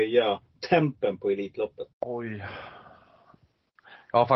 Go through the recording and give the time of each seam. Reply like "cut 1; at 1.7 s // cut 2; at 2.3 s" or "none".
cut 1; at 1.9 s